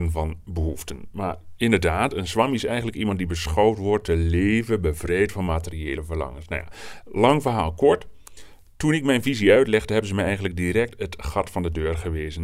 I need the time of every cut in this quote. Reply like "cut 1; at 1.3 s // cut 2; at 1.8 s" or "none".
none

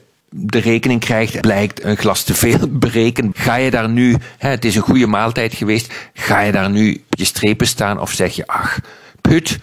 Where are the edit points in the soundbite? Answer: cut 1; at 1.4 s // cut 2; at 1.8 s // cut 3; at 3.3 s // cut 4; at 7.1 s

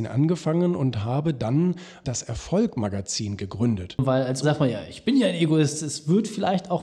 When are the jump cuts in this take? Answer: cut 1; at 2.0 s // cut 2; at 4.4 s

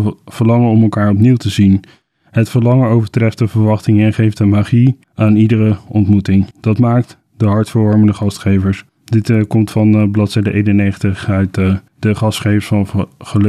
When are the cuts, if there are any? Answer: cut 1; at 5.0 s // cut 2; at 6.5 s // cut 3; at 8.9 s // cut 4; at 11.9 s

